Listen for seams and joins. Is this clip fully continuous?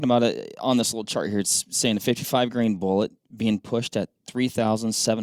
no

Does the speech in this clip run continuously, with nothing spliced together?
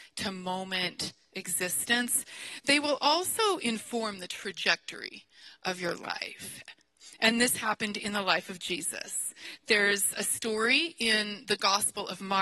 yes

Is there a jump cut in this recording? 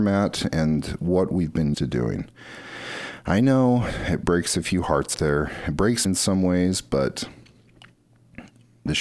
yes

